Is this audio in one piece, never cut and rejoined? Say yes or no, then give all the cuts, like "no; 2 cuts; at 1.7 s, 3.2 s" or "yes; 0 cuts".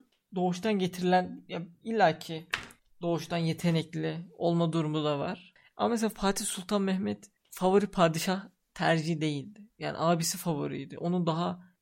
yes; 0 cuts